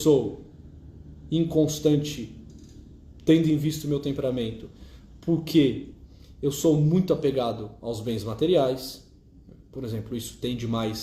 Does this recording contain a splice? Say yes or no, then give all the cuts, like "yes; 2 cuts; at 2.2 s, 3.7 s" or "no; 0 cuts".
no; 0 cuts